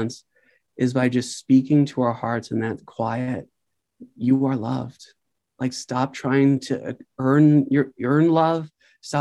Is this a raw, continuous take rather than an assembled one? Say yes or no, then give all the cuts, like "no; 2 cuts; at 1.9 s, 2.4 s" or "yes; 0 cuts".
no; 1 cut; at 7.1 s